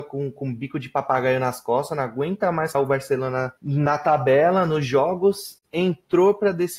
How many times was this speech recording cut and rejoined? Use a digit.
2